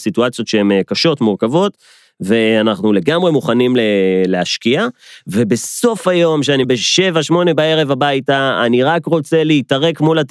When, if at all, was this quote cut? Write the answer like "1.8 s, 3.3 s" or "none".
6.6 s